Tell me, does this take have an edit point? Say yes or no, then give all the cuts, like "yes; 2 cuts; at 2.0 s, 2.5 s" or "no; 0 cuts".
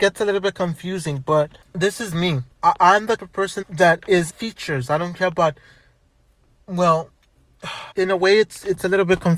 yes; 6 cuts; at 1.6 s, 2.5 s, 3.2 s, 3.6 s, 4.3 s, 7.9 s